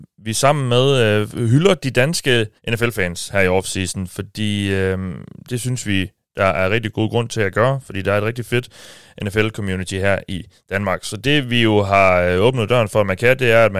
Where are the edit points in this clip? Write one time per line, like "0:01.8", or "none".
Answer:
0:02.6